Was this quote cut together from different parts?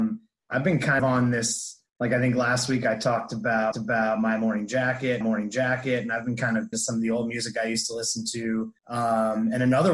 yes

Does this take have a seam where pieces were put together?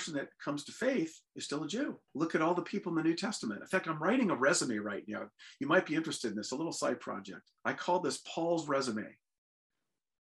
yes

